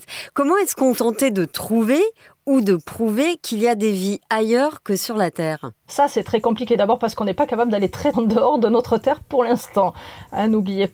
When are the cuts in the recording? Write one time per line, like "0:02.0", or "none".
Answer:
0:01.0
0:05.9
0:08.1

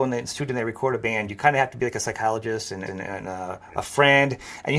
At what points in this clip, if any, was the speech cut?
0:02.9

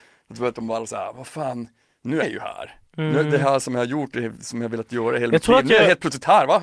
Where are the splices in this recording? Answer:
0:02.2

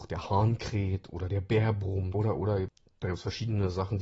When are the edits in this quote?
0:02.1

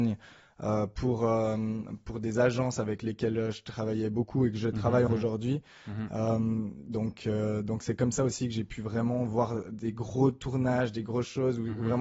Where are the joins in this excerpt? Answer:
0:05.1

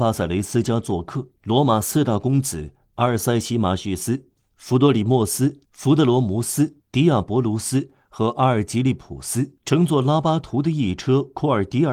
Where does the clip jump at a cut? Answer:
0:01.4
0:05.6
0:06.8
0:09.6

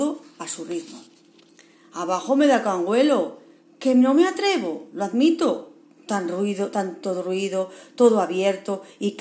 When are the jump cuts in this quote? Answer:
none

